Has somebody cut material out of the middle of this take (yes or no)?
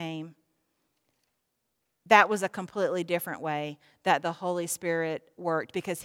no